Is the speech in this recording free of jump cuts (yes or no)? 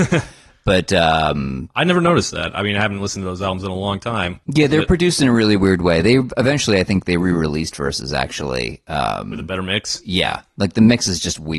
no